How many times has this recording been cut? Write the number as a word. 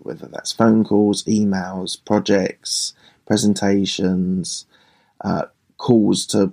zero